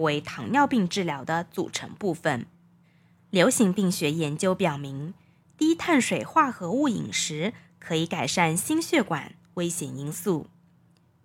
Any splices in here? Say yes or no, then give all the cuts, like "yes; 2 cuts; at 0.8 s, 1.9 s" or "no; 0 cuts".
no; 0 cuts